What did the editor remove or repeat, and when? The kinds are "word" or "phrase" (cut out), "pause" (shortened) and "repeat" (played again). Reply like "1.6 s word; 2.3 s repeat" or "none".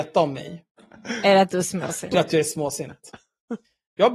2.1 s word